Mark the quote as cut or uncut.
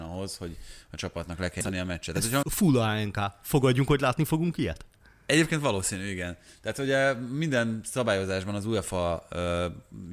cut